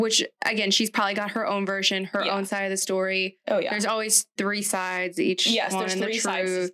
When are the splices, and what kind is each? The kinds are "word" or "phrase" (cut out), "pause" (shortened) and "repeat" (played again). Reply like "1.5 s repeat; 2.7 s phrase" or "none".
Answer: none